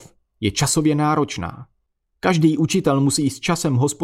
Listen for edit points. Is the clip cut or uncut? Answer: uncut